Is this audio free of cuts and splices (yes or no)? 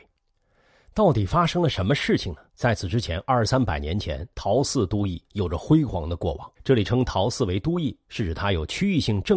no